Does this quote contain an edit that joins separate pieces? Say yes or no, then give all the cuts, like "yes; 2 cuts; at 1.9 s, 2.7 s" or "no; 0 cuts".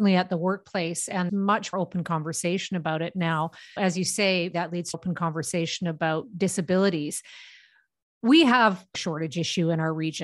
yes; 6 cuts; at 1.3 s, 1.7 s, 3.8 s, 4.5 s, 4.9 s, 8.9 s